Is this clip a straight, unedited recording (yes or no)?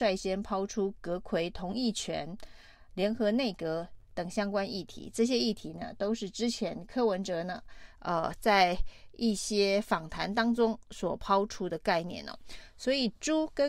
yes